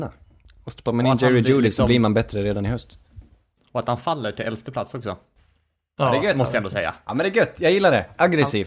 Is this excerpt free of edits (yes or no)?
yes